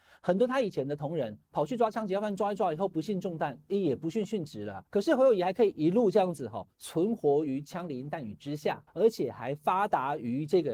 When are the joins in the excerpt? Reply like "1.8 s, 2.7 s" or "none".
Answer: 1.4 s, 4.9 s, 6.7 s, 8.9 s